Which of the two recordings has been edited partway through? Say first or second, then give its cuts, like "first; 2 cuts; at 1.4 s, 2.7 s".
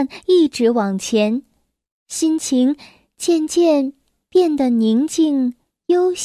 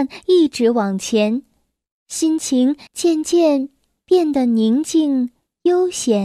second; 1 cut; at 2.9 s